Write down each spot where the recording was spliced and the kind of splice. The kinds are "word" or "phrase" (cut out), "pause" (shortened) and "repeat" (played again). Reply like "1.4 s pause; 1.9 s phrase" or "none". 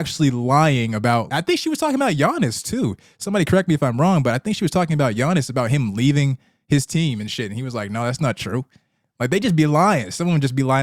1.3 s word